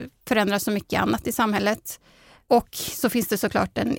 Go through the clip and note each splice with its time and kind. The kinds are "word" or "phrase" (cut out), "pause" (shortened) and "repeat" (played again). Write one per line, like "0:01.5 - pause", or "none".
none